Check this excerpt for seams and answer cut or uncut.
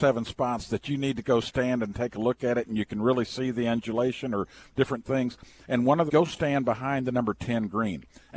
cut